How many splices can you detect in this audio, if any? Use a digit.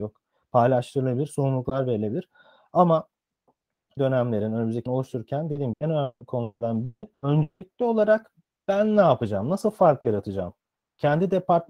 4